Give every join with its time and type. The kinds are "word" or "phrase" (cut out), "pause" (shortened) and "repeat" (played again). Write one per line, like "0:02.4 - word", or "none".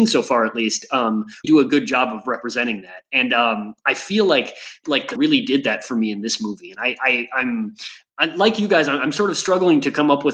0:01.4 - word
0:05.2 - word